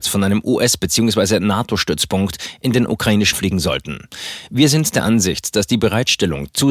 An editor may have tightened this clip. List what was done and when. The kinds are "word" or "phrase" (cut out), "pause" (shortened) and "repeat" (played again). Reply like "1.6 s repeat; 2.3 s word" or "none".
2.9 s word; 3.3 s word